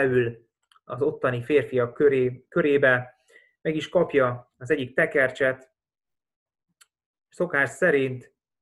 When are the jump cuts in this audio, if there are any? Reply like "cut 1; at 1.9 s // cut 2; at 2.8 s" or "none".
none